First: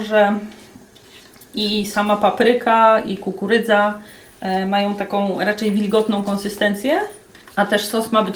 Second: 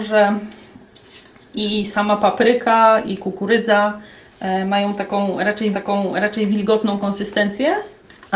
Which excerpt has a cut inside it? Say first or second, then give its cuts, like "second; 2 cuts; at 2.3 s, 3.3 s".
second; 1 cut; at 5.7 s